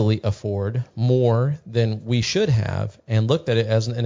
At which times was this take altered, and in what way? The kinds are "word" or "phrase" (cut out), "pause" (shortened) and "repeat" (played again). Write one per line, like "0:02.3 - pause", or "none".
none